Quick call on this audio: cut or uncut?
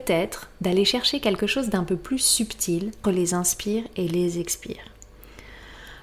cut